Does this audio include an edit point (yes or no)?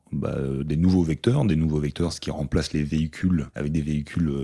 yes